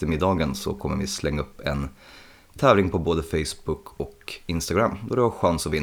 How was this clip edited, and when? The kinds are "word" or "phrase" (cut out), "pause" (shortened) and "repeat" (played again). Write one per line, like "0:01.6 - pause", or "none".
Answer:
none